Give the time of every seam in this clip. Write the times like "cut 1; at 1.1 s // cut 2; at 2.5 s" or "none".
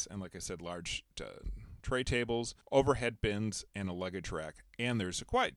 cut 1; at 2.6 s

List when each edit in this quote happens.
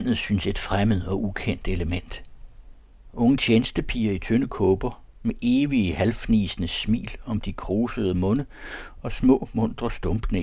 none

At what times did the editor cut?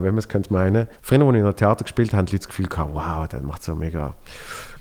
cut 1; at 1.0 s

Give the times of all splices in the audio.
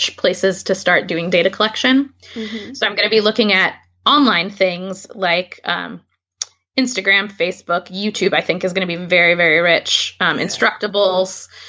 none

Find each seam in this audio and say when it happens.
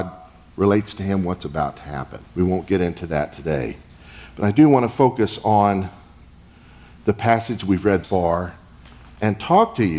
cut 1; at 2.3 s // cut 2; at 8.0 s

